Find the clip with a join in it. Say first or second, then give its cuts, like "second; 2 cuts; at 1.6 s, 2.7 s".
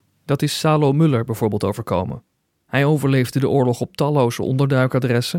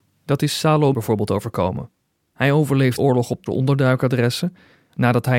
second; 3 cuts; at 0.9 s, 3.0 s, 3.5 s